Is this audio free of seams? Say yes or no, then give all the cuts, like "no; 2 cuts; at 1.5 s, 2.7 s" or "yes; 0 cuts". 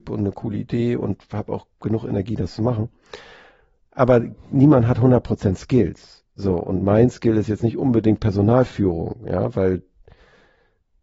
yes; 0 cuts